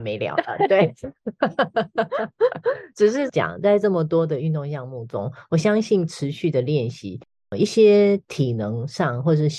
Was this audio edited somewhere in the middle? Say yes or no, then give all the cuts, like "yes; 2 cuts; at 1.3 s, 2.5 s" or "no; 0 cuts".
no; 0 cuts